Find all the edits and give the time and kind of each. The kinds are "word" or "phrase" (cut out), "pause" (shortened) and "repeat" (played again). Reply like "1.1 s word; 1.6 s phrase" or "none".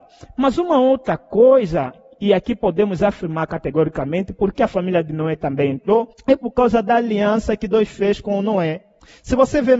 4.5 s word; 6.1 s pause